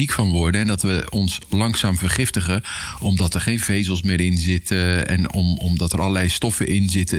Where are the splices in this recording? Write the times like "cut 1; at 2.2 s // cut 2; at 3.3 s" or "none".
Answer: none